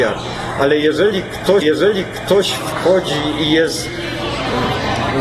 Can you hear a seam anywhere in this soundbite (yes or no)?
yes